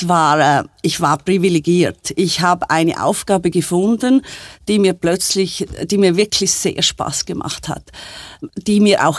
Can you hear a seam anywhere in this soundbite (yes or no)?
no